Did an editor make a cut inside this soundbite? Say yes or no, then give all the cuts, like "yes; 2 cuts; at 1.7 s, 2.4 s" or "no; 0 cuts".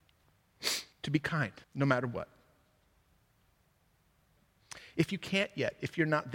yes; 2 cuts; at 0.9 s, 1.6 s